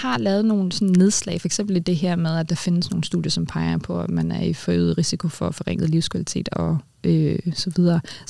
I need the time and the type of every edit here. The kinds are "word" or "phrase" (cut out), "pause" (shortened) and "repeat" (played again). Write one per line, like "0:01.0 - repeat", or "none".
none